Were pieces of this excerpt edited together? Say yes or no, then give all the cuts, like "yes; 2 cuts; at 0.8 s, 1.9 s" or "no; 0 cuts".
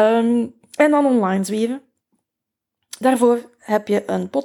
no; 0 cuts